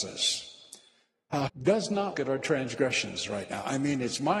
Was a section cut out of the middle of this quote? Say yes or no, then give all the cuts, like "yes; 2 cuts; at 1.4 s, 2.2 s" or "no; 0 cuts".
yes; 2 cuts; at 1.5 s, 2.1 s